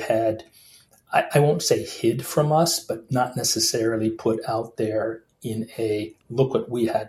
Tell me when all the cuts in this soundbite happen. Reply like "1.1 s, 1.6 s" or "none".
none